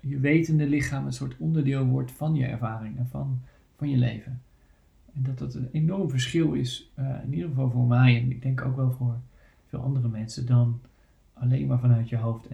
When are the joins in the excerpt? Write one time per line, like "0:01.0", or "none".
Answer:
none